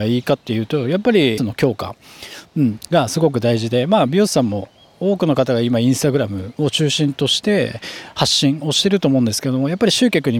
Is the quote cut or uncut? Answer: cut